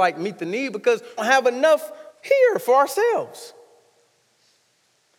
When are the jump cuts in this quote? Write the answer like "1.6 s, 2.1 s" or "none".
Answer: 1.2 s, 2.1 s